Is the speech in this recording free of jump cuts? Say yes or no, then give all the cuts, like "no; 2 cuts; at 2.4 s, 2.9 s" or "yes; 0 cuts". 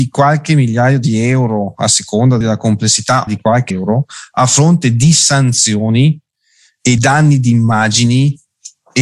no; 4 cuts; at 2.4 s, 3.3 s, 3.7 s, 7.0 s